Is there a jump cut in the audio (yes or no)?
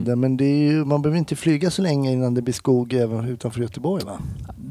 no